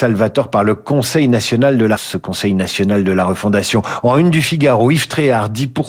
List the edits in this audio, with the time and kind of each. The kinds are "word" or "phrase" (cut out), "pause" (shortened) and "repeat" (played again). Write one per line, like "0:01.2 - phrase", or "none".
0:02.0 - word